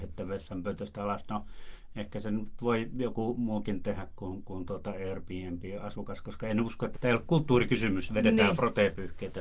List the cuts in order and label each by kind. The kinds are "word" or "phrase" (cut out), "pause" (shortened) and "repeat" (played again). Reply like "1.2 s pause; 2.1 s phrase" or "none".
6.9 s phrase